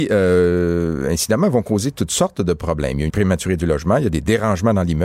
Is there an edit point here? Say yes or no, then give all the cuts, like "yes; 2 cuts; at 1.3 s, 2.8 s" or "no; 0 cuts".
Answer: yes; 1 cut; at 3.1 s